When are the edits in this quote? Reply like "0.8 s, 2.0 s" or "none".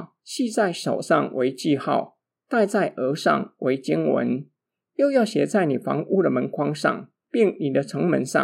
none